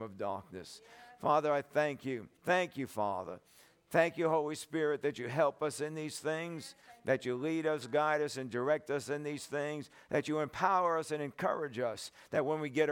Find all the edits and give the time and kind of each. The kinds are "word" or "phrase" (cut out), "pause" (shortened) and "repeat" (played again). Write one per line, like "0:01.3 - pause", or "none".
0:02.4 - pause

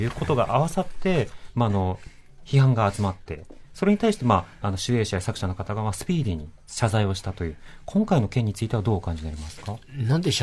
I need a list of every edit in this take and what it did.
none

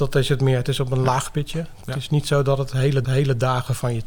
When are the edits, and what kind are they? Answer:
0:03.0 - repeat

